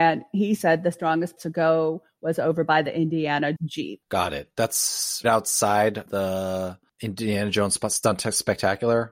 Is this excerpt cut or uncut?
cut